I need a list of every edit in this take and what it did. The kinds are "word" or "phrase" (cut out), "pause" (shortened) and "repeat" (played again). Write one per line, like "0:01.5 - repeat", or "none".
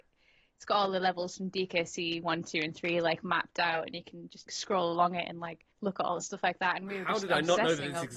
0:04.5 - word
0:05.7 - pause
0:06.2 - phrase